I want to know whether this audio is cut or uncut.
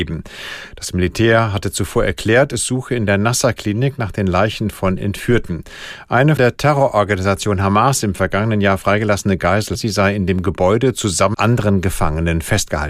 cut